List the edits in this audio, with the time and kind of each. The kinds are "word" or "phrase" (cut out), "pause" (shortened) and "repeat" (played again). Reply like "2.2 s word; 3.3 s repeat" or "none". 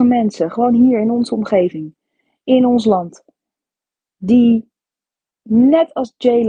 none